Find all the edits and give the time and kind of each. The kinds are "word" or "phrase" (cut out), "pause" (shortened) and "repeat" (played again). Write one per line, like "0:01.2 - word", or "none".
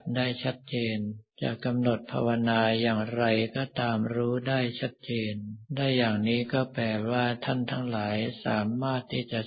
0:01.3 - pause
0:05.7 - pause